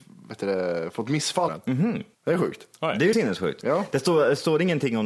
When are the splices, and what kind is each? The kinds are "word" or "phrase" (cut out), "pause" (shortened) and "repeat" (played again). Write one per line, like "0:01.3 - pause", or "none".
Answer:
0:01.5 - word
0:02.1 - pause
0:03.1 - word